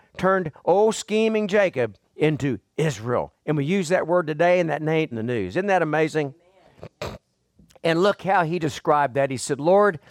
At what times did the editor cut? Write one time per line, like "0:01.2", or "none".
0:02.0
0:03.4
0:05.1